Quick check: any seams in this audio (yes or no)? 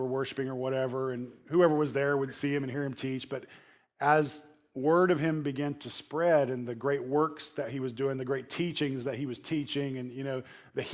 no